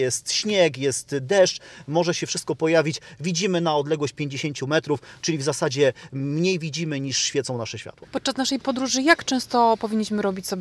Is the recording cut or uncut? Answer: uncut